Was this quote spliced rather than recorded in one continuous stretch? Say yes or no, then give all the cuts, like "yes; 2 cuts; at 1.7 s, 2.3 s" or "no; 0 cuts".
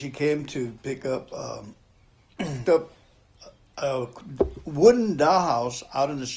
yes; 1 cut; at 2.6 s